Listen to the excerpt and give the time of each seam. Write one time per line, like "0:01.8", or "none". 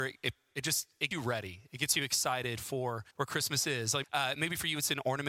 0:01.1
0:03.1
0:04.0